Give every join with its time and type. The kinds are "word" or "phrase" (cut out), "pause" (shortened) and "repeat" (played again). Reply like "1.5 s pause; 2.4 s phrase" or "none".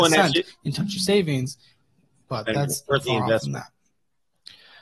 1.0 s word; 2.9 s word